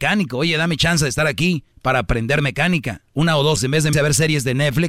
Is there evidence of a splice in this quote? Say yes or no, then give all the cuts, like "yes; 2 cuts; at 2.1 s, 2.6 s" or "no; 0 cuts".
yes; 4 cuts; at 1.7 s, 3.1 s, 3.6 s, 3.9 s